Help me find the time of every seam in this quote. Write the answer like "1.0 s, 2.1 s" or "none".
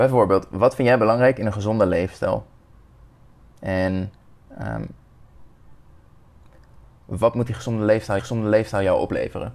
8.2 s